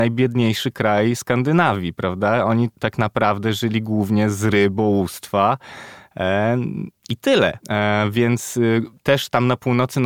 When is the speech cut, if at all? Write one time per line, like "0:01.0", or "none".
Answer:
0:02.7
0:07.6
0:09.0